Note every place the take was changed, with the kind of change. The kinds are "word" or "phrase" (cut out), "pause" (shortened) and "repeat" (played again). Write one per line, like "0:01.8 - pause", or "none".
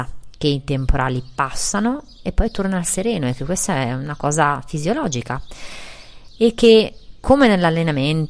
none